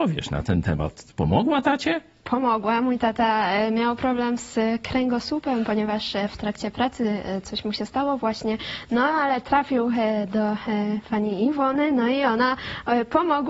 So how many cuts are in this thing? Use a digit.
0